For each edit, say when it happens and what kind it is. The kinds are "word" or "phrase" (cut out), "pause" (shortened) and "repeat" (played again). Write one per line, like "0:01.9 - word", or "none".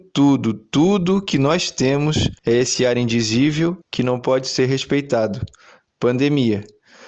0:02.4 - pause
0:03.8 - pause